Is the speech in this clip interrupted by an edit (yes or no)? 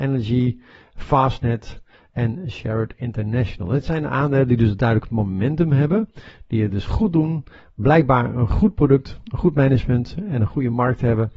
no